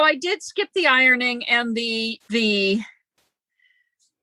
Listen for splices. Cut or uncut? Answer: cut